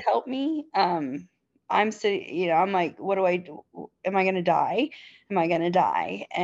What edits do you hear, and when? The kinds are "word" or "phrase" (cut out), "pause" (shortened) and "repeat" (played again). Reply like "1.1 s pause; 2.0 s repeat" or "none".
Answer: none